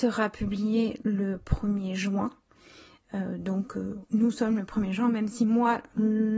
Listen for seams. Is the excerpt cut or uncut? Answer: uncut